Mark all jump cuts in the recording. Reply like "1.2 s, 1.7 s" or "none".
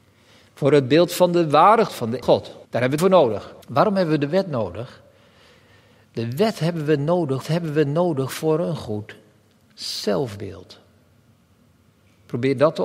1.9 s, 2.2 s, 2.6 s, 3.0 s, 3.6 s, 7.4 s